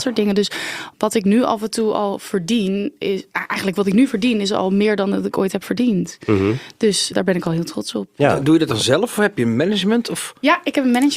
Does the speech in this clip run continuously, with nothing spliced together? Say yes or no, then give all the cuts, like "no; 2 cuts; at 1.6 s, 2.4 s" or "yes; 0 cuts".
no; 1 cut; at 7.1 s